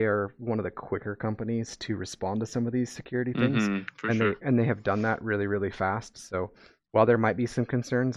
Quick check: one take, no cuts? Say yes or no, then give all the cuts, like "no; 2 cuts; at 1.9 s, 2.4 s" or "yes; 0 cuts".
yes; 0 cuts